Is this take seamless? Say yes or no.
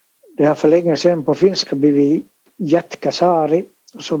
yes